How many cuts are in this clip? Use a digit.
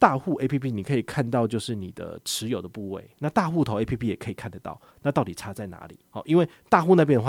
1